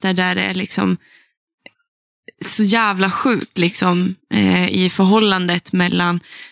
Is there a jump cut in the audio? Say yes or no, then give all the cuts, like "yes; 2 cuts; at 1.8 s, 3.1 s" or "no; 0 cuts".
no; 0 cuts